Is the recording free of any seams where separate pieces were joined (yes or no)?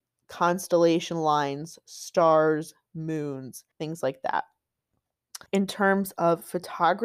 no